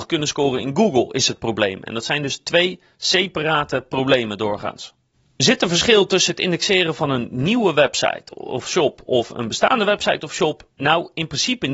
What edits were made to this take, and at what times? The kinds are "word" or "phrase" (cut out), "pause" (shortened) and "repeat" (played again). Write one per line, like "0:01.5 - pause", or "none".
none